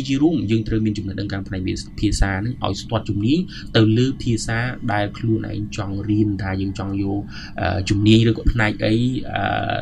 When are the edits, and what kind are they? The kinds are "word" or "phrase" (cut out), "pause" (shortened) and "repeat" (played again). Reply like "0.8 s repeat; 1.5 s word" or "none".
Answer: 8.5 s word